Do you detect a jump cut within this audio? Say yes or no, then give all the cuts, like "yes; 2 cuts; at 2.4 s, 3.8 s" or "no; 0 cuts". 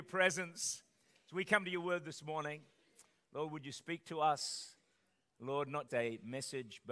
yes; 1 cut; at 5.9 s